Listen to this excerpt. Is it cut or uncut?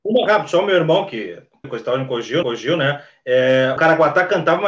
cut